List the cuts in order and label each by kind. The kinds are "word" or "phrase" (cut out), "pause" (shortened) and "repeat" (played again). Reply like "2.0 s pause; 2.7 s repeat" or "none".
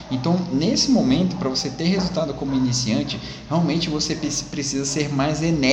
none